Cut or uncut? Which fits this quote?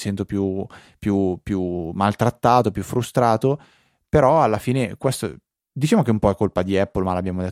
uncut